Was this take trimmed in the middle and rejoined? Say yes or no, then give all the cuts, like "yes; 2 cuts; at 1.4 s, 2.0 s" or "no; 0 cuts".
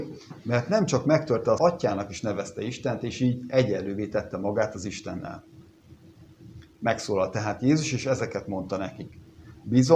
yes; 1 cut; at 1.6 s